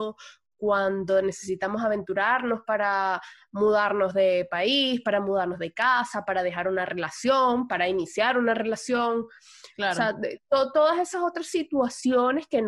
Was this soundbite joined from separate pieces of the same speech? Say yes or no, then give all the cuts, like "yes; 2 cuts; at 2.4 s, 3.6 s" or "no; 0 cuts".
no; 0 cuts